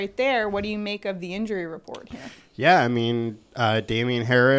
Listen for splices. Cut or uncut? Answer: uncut